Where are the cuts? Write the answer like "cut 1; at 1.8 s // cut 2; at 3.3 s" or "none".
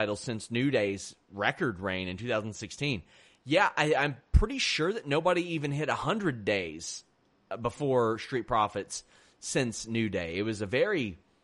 none